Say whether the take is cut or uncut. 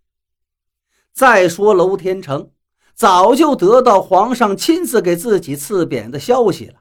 uncut